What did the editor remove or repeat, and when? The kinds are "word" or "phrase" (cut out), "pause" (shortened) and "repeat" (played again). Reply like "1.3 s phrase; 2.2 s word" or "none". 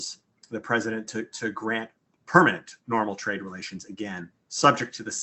2.2 s word